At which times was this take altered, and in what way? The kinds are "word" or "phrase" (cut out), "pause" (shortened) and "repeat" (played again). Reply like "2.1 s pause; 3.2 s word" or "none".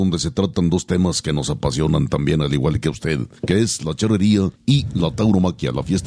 3.4 s pause; 4.6 s pause

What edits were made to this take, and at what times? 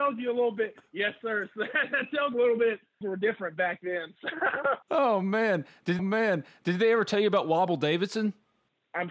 2.3 s word; 3.0 s phrase; 4.8 s pause; 6.0 s repeat

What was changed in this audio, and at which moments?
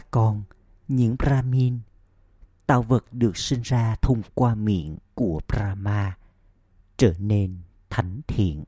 5.1 s pause

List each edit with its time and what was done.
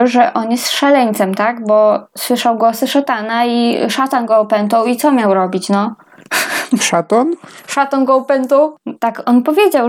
none

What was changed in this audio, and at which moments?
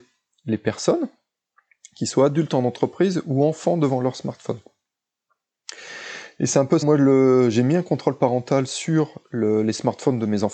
6.8 s word

